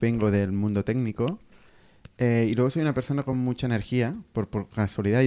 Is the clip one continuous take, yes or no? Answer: yes